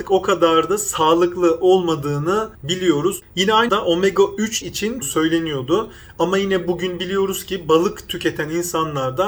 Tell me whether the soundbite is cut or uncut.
cut